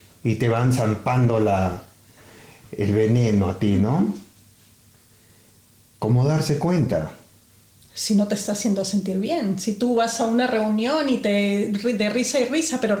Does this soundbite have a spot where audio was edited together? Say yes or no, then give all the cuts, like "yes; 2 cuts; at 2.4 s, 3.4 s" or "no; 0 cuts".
no; 0 cuts